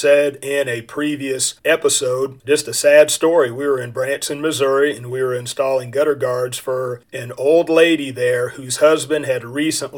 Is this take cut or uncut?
cut